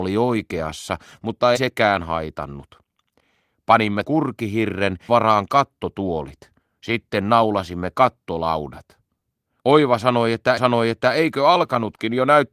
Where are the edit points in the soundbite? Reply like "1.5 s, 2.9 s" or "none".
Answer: 1.6 s, 4.0 s, 5.1 s, 10.6 s